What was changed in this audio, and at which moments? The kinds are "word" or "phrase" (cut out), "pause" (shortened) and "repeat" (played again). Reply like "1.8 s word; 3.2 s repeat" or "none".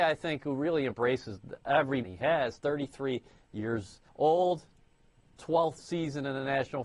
2.0 s word; 4.1 s pause

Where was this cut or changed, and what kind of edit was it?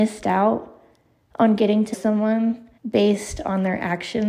1.9 s word; 2.8 s pause

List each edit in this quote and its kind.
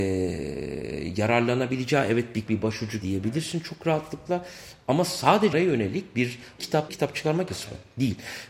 2.5 s word; 3.0 s word; 5.5 s word; 6.6 s word; 6.9 s phrase; 7.5 s phrase

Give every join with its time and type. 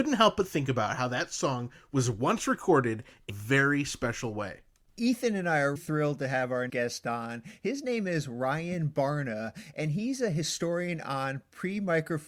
3.3 s word; 5.8 s word; 6.7 s word

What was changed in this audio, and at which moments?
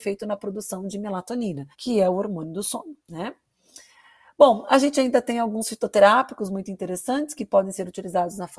1.7 s pause; 3.0 s pause

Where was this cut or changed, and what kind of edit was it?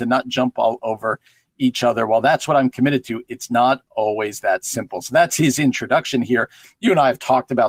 none

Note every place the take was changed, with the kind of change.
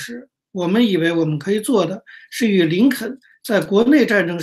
none

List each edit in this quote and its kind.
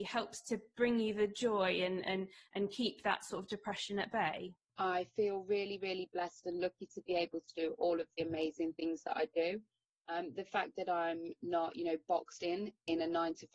none

